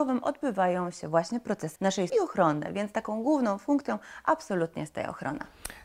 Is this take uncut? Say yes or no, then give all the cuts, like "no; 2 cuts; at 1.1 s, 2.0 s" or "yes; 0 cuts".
no; 2 cuts; at 1.8 s, 2.1 s